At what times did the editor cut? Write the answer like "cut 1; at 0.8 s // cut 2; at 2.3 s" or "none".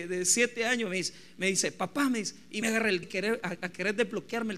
cut 1; at 2.6 s // cut 2; at 3.0 s